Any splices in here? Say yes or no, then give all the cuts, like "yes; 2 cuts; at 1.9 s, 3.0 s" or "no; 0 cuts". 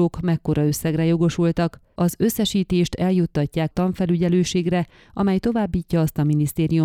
yes; 1 cut; at 3.7 s